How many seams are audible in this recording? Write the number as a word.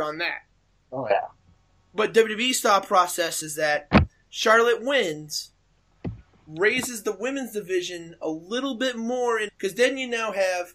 two